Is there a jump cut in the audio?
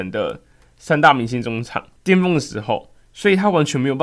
yes; 1 cut; at 2.0 s

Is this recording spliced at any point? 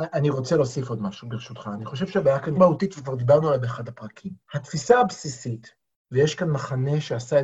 yes; 2 cuts; at 2.6 s, 4.4 s

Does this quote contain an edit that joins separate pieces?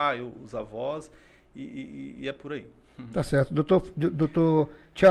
no; 0 cuts

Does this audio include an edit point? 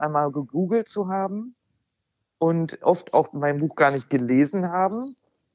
no; 0 cuts

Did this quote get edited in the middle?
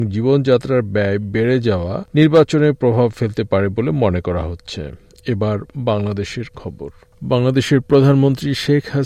no; 0 cuts

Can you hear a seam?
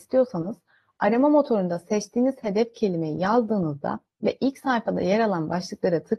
no; 0 cuts

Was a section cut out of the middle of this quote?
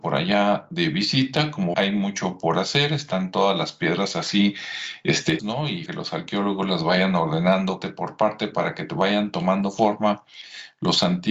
yes; 4 cuts; at 1.7 s, 5.4 s, 5.9 s, 7.8 s

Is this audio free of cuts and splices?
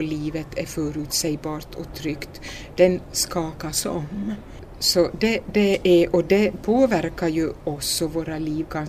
yes; 0 cuts

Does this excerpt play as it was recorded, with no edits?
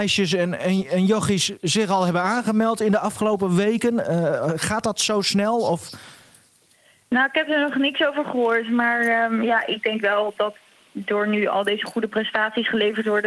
yes; 0 cuts

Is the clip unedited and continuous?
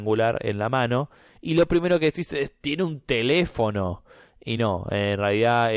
yes; 0 cuts

